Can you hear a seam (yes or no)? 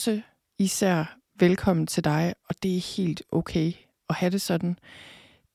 no